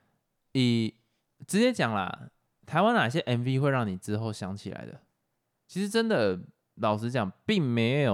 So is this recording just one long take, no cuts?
yes; 0 cuts

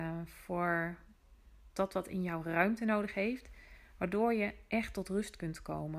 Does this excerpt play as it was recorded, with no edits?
yes; 0 cuts

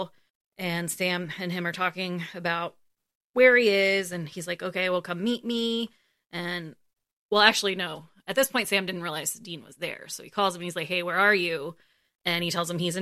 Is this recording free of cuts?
yes; 0 cuts

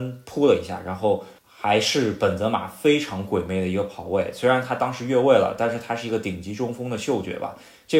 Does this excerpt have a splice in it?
yes; 1 cut; at 1.4 s

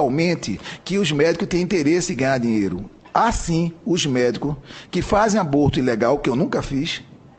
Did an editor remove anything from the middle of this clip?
no; 0 cuts

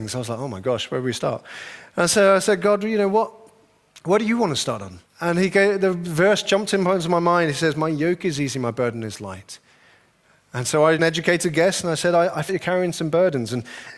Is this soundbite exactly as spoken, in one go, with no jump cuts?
no; 3 cuts; at 5.1 s, 11.0 s, 12.5 s

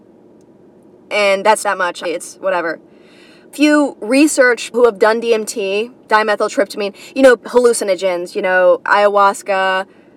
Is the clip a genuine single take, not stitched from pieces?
no; 6 cuts; at 1.6 s, 2.0 s, 3.5 s, 4.7 s, 6.0 s, 7.4 s

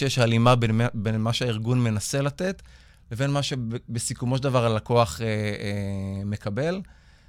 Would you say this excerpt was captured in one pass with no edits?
yes; 0 cuts

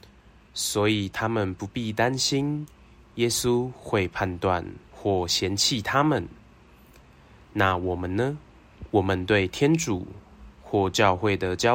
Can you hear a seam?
yes; 2 cuts; at 4.8 s, 8.9 s

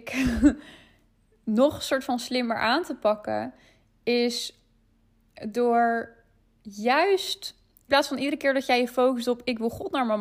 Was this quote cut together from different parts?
yes; 1 cut; at 7.9 s

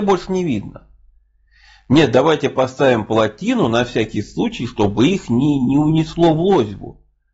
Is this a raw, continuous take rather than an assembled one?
yes; 0 cuts

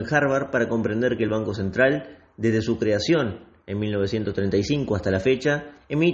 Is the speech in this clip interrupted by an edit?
no; 0 cuts

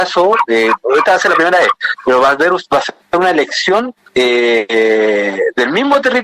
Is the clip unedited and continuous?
yes; 0 cuts

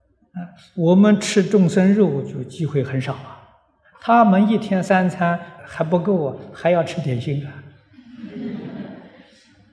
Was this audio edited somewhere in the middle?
yes; 1 cut; at 5.6 s

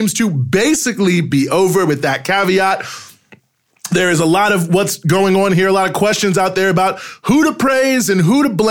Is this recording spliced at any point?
no; 0 cuts

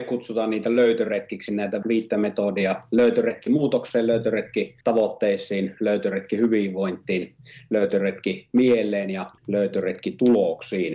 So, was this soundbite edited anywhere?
yes; 3 cuts; at 1.8 s, 4.8 s, 9.4 s

